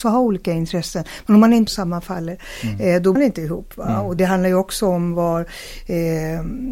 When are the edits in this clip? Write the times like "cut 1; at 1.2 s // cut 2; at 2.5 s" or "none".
cut 1; at 1.7 s // cut 2; at 3.2 s // cut 3; at 4.2 s